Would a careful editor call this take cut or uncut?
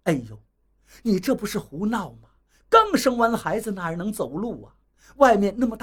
uncut